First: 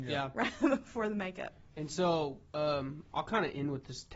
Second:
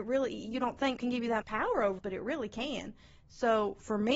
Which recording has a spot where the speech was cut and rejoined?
second; 3 cuts; at 1.0 s, 1.4 s, 2.0 s

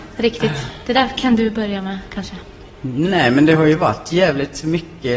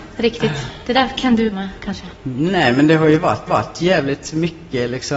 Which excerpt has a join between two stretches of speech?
second; 3 cuts; at 1.5 s, 2.2 s, 3.5 s

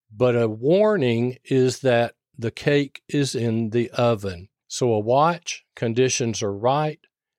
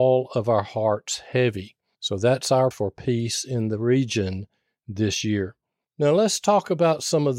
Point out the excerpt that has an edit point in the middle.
second; 1 cut; at 2.7 s

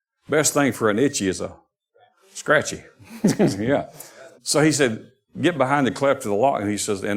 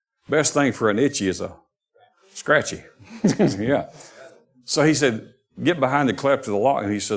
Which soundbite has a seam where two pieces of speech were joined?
first; 1 cut; at 4.4 s

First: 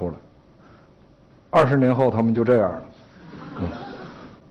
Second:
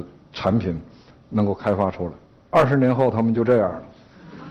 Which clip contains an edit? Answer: second; 1 cut; at 2.3 s

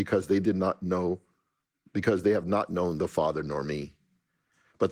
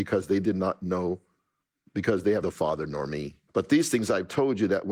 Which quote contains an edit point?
second; 2 cuts; at 2.4 s, 3.5 s

